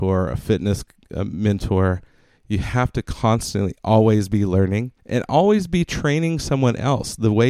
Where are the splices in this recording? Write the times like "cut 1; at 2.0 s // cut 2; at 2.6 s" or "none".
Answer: cut 1; at 5.0 s